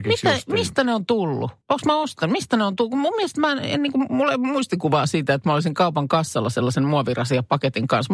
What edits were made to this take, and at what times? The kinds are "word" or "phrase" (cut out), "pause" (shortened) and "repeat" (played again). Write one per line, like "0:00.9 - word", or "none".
0:01.6 - pause